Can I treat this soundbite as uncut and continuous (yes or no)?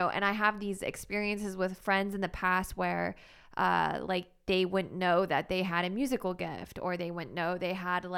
yes